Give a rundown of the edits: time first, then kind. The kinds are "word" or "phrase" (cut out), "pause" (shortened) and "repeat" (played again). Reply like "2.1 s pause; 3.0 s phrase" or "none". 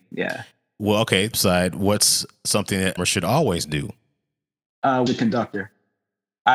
1.3 s word; 3.0 s word; 5.1 s word